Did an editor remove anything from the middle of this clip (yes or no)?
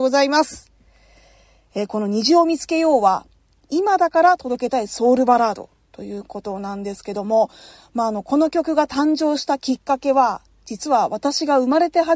no